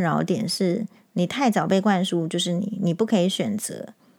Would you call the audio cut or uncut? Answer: uncut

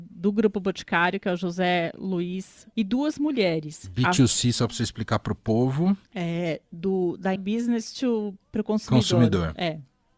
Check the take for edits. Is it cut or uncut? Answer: cut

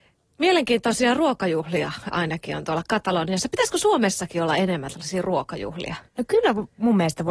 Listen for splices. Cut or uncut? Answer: cut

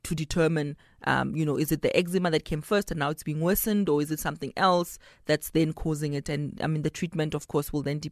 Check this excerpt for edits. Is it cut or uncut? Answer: uncut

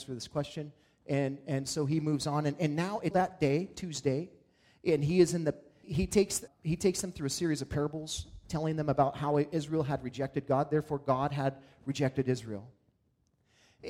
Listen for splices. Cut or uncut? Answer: cut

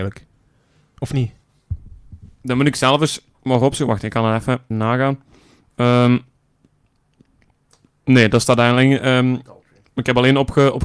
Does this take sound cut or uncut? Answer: cut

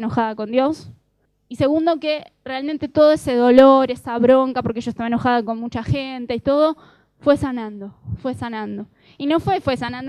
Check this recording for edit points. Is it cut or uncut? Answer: cut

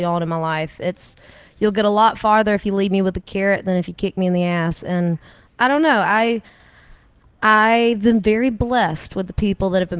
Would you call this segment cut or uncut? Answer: uncut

